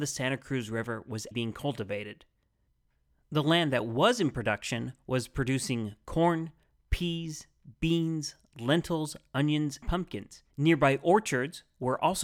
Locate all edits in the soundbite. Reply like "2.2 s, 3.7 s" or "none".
1.3 s, 9.8 s, 10.5 s